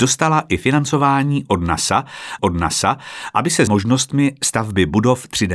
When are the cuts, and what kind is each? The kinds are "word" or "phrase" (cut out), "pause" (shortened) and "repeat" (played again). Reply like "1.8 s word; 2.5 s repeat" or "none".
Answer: 2.4 s repeat; 3.7 s word